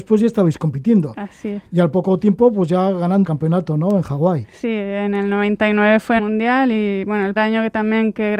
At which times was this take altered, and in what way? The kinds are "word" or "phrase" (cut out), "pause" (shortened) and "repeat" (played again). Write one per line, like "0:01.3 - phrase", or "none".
0:03.2 - phrase
0:06.2 - phrase
0:07.4 - word